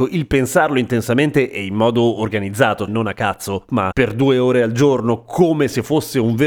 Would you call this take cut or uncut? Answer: cut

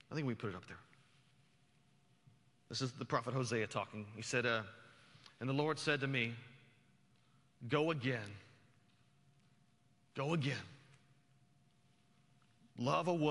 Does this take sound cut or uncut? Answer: uncut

